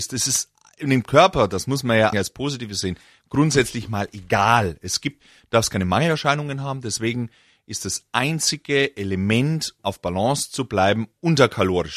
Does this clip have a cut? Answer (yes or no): yes